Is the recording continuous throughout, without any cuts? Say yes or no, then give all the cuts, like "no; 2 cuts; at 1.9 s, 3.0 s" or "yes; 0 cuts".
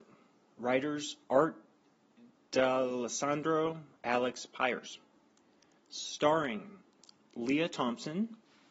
no; 1 cut; at 4.0 s